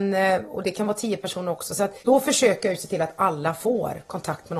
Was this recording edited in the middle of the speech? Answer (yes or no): yes